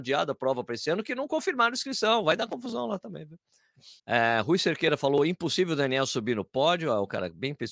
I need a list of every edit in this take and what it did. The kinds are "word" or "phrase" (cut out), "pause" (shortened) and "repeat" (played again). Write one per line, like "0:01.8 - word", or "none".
0:04.0 - pause